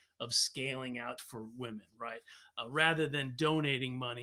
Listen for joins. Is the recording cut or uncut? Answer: cut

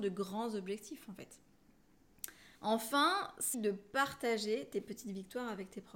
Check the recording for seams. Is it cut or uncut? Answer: cut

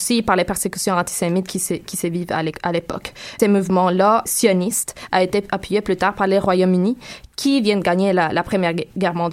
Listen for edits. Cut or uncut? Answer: cut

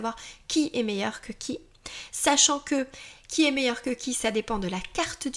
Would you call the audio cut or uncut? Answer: uncut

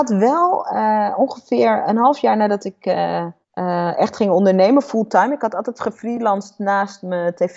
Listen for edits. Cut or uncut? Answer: cut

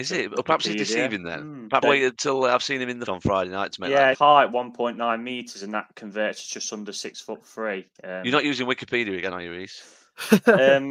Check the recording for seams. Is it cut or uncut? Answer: cut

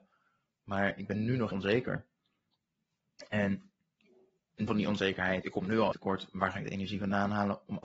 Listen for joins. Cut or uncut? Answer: cut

